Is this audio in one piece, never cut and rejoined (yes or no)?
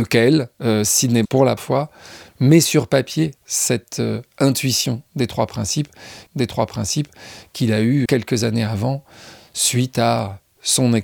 no